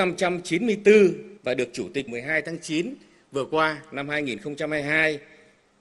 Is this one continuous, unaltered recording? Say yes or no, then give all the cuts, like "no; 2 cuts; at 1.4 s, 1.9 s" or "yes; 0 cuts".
no; 2 cuts; at 1.4 s, 2.1 s